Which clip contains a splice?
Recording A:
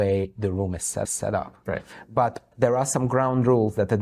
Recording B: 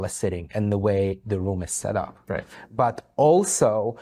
A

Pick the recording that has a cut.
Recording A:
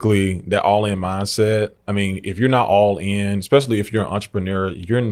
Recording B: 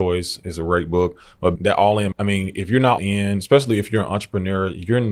B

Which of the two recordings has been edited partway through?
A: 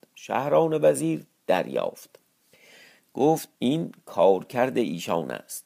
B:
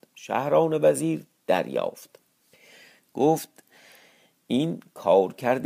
A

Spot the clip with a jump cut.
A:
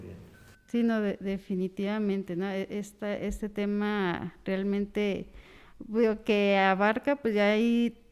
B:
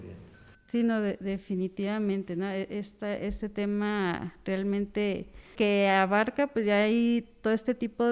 B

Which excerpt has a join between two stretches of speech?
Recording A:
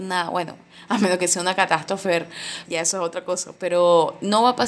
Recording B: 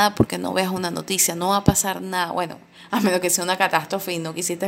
A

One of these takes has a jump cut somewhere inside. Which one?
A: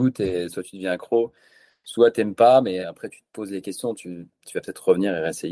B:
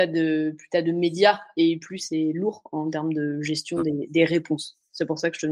A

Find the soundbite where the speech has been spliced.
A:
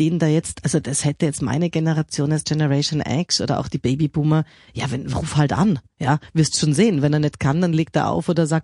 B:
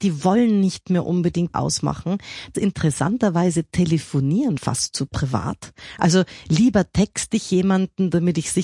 B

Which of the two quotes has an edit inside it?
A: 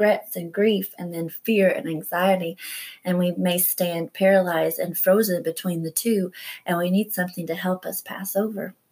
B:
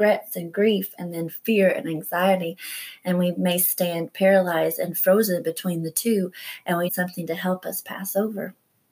B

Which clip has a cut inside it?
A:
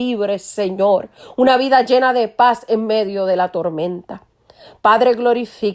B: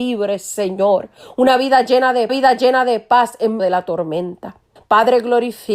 B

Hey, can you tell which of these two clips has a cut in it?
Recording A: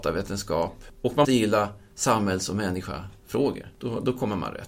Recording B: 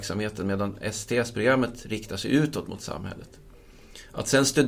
A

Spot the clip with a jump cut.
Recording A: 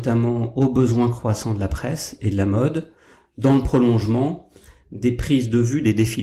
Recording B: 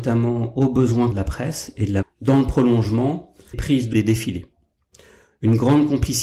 B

